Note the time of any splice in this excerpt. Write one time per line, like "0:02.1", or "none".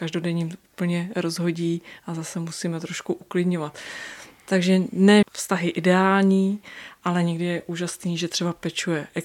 0:05.2